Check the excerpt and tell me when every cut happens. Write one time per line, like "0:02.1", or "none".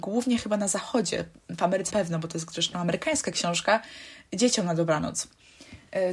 0:01.9